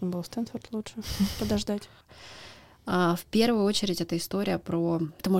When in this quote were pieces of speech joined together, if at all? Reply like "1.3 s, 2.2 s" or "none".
none